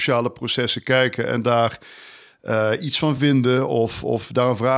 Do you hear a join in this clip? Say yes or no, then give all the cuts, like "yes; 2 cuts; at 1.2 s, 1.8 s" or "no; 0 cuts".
no; 0 cuts